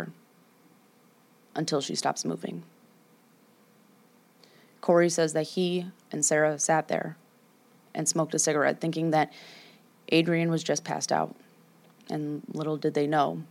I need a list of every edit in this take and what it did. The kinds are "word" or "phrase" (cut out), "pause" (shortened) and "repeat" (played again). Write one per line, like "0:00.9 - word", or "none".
none